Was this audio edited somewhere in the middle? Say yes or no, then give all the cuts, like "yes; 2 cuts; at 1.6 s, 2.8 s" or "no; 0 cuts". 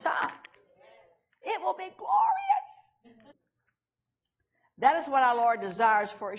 yes; 1 cut; at 3.3 s